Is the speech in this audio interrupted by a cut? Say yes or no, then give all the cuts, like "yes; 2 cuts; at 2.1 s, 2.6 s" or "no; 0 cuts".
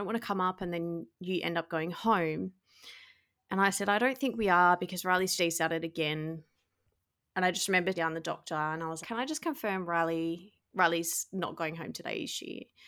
yes; 3 cuts; at 5.4 s, 7.9 s, 9.0 s